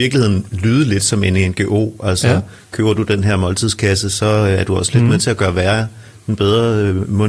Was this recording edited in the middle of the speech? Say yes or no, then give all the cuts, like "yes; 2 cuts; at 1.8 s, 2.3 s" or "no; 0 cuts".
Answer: no; 0 cuts